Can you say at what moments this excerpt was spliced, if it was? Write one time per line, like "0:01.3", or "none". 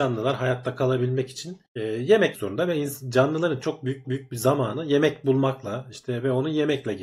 0:01.6
0:02.3
0:03.6
0:04.0